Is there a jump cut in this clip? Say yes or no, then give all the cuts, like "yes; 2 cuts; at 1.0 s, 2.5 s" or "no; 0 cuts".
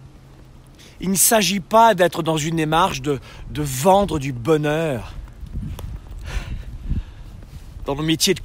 no; 0 cuts